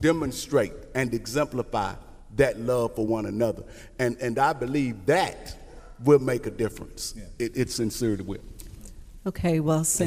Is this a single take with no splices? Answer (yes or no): yes